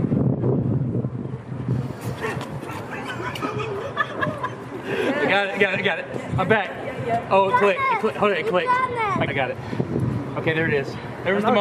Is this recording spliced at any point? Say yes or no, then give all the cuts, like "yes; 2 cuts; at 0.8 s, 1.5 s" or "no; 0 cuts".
yes; 1 cut; at 9.3 s